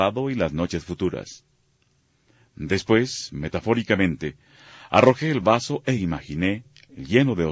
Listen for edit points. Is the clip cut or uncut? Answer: uncut